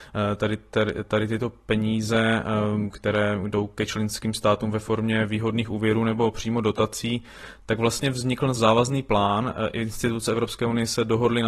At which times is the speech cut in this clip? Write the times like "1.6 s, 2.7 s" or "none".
8.6 s